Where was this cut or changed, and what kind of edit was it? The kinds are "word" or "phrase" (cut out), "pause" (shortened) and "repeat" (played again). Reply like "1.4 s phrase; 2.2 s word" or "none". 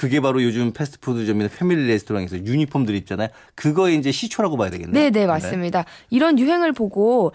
none